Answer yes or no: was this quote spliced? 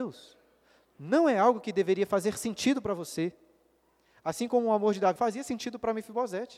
yes